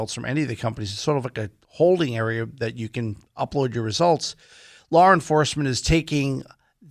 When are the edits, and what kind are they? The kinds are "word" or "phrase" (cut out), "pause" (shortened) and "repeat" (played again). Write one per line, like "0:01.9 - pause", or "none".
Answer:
none